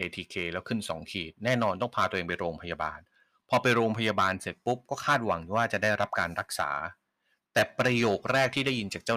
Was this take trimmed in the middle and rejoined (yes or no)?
no